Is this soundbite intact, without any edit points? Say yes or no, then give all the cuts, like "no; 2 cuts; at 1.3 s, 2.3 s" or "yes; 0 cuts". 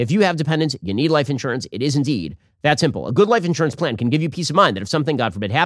yes; 0 cuts